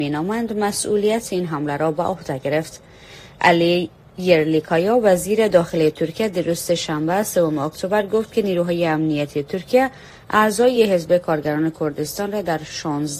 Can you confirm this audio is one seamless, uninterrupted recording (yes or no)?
yes